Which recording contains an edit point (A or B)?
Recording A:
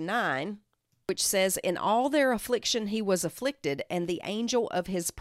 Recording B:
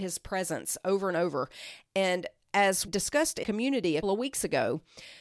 B